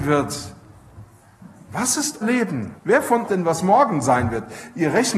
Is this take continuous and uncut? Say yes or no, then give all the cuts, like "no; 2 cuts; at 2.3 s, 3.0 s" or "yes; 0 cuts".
no; 3 cuts; at 2.2 s, 2.8 s, 3.3 s